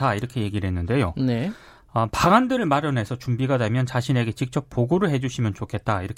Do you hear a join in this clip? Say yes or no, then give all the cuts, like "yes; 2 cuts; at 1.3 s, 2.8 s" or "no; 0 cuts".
no; 0 cuts